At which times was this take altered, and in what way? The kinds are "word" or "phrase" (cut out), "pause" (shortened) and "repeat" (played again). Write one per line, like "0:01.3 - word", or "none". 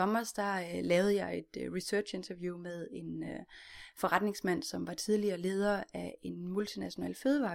none